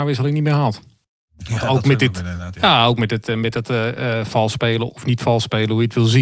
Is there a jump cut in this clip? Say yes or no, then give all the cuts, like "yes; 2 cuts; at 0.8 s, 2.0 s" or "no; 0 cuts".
yes; 1 cut; at 4.9 s